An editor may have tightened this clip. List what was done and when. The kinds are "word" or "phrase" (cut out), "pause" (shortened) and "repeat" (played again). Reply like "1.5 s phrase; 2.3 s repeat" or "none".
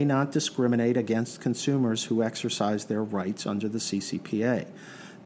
none